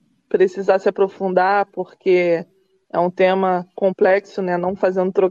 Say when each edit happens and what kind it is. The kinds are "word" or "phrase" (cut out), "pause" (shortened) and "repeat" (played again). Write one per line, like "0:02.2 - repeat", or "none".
none